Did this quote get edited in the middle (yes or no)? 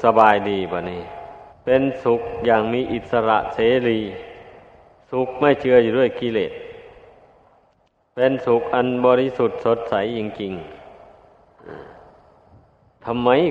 yes